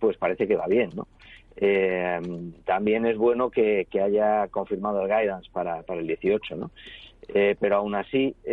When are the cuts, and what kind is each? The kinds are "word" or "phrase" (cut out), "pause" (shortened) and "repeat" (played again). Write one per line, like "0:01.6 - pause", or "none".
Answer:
none